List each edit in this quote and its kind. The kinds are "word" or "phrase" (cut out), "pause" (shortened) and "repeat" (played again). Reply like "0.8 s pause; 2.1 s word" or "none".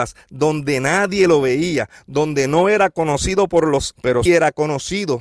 4.0 s word; 4.3 s word